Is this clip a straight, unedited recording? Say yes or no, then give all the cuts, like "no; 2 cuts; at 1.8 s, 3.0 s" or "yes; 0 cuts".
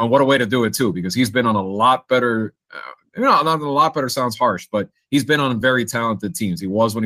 yes; 0 cuts